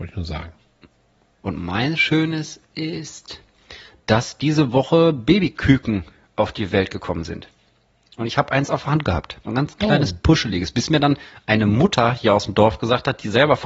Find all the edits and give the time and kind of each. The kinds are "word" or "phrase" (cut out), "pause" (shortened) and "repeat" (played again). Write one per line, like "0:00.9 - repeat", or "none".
0:09.4 - pause